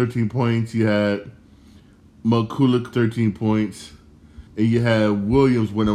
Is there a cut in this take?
yes; 2 cuts; at 2.9 s, 4.5 s

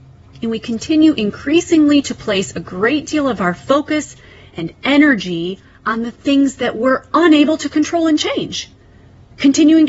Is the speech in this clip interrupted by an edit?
no; 0 cuts

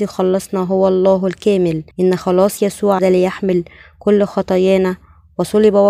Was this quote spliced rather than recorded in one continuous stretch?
yes; 2 cuts; at 1.9 s, 3.0 s

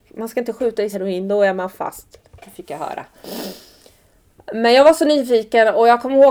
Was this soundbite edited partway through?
yes; 1 cut; at 0.9 s

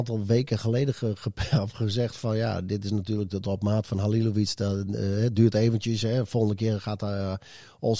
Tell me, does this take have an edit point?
no; 0 cuts

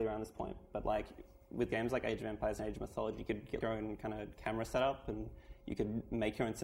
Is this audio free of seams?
no; 1 cut; at 3.6 s

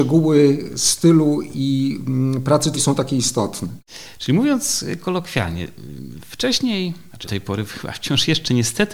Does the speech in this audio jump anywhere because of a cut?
yes; 2 cuts; at 2.7 s, 7.2 s

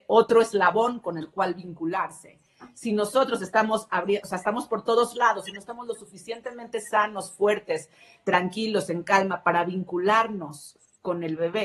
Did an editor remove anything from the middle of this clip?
no; 0 cuts

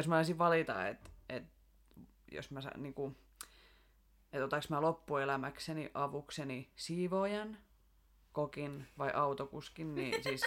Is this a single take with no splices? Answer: yes; 0 cuts

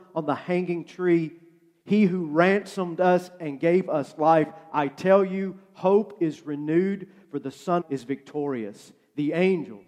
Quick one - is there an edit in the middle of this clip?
yes; 1 cut; at 7.8 s

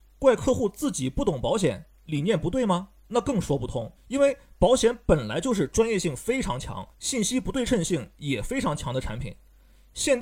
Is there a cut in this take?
yes; 3 cuts; at 3.0 s, 3.9 s, 6.9 s

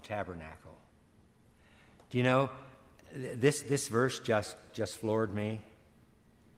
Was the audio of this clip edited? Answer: yes; 1 cut; at 4.7 s

